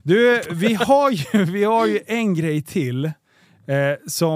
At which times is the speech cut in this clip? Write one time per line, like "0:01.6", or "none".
none